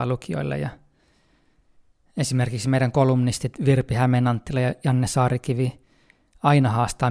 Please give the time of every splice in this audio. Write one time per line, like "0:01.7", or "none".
none